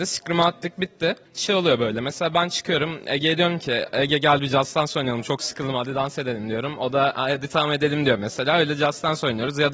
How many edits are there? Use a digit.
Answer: 1